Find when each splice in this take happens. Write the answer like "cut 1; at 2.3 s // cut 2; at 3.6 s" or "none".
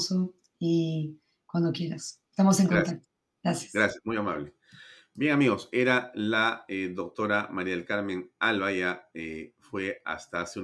none